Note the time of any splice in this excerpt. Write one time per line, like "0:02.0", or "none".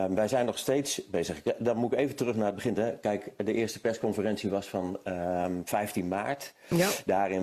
none